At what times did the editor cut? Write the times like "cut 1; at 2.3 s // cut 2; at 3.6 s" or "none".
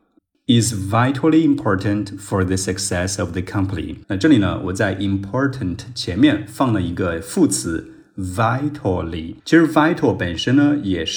cut 1; at 4.0 s // cut 2; at 9.4 s